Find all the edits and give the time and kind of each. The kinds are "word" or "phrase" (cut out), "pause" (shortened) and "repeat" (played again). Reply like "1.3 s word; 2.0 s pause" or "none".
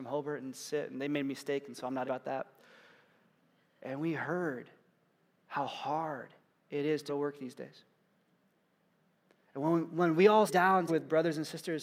2.0 s word; 7.1 s word; 10.5 s word; 10.9 s word